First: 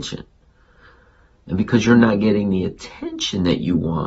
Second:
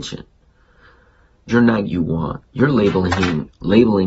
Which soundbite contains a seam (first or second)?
second